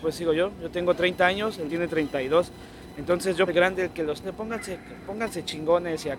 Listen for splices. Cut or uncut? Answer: cut